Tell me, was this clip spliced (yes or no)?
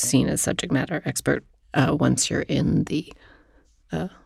no